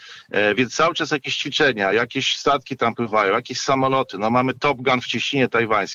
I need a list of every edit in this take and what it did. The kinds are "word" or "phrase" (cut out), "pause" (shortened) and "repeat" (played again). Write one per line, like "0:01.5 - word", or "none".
none